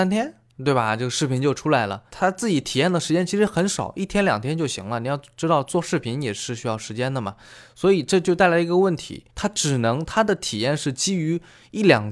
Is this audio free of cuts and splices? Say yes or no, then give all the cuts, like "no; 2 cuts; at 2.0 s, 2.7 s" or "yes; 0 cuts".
no; 2 cuts; at 2.1 s, 9.3 s